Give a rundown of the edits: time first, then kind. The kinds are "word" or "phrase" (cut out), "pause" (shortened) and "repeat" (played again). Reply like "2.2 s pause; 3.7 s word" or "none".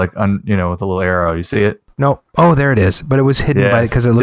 2.3 s pause